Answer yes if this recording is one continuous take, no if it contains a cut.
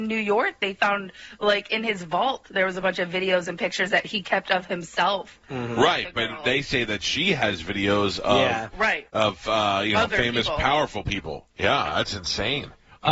no